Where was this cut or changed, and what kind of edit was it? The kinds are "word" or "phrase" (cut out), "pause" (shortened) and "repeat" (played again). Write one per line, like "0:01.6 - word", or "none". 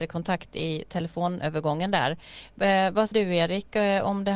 0:03.1 - word